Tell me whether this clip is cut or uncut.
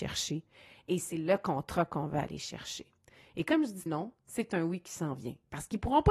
cut